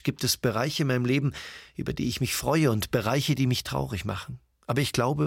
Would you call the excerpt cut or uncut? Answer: uncut